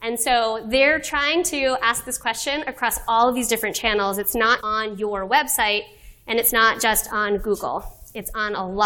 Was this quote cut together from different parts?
yes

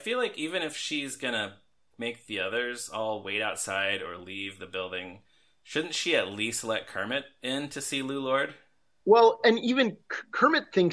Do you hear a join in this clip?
no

